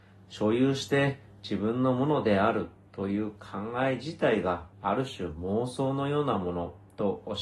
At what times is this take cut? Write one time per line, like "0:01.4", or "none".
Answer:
0:04.7